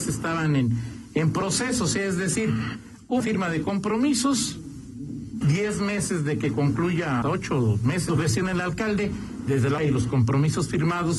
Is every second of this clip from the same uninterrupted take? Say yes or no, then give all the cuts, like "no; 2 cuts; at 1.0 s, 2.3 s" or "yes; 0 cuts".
no; 5 cuts; at 3.2 s, 5.4 s, 7.2 s, 8.1 s, 9.8 s